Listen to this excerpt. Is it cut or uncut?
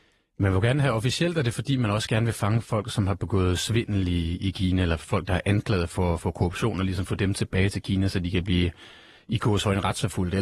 uncut